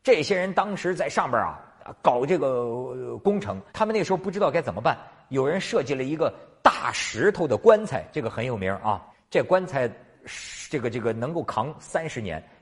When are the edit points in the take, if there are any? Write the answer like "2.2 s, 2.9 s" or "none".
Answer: 3.7 s, 9.1 s